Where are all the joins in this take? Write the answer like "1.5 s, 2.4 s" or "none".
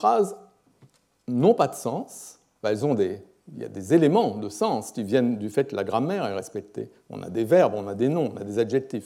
none